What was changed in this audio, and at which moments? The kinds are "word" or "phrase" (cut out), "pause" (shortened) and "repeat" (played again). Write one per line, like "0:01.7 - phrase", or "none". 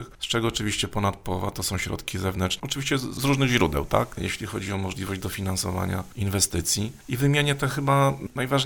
none

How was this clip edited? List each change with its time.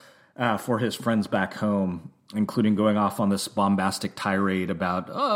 none

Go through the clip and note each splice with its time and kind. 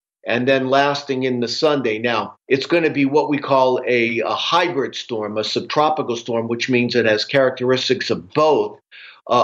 0:02.4 - pause

